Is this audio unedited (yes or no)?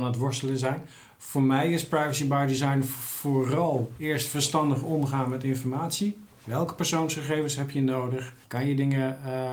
no